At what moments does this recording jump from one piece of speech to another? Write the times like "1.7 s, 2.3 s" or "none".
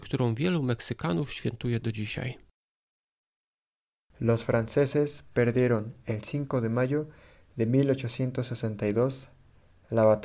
none